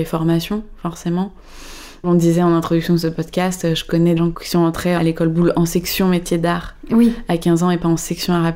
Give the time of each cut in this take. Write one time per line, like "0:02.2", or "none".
0:04.2